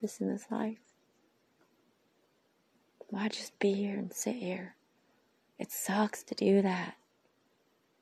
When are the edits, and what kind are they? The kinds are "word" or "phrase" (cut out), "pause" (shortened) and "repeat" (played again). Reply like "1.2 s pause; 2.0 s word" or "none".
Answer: none